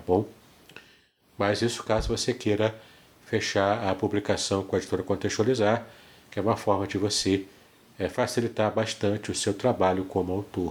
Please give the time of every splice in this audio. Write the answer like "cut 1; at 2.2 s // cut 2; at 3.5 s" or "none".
none